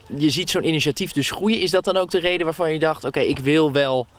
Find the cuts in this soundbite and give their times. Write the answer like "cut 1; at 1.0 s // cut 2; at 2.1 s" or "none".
none